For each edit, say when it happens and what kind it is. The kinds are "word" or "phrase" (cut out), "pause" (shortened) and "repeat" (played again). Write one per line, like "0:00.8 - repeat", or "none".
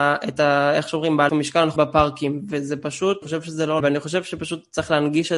0:01.3 - word
0:01.8 - word
0:03.2 - word
0:03.8 - word